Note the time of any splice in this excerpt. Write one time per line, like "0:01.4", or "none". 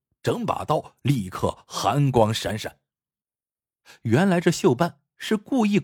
none